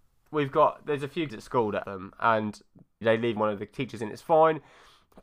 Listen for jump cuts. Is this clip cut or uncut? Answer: cut